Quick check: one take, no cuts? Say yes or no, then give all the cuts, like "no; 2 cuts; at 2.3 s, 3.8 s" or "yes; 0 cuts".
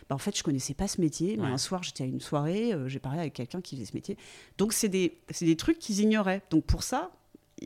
yes; 0 cuts